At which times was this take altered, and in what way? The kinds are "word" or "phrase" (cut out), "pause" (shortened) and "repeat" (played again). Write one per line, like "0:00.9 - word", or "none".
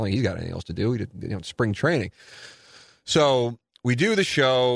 none